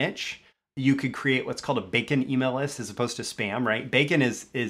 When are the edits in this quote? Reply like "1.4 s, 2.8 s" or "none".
none